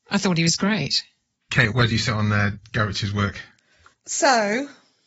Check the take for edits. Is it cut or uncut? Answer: uncut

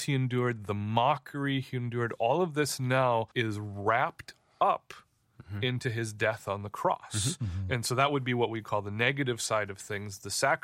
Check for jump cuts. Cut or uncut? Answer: cut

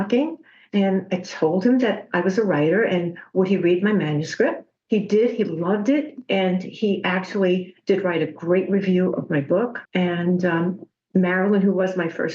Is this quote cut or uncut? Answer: cut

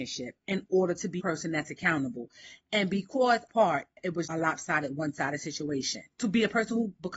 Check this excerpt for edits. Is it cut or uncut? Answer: cut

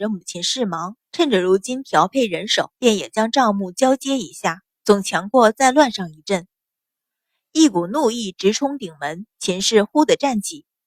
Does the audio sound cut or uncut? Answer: cut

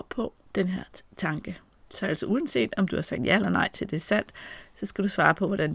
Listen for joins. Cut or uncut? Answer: uncut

